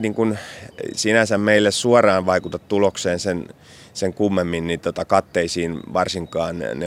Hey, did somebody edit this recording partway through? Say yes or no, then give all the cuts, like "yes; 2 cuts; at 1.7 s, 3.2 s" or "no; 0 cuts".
no; 0 cuts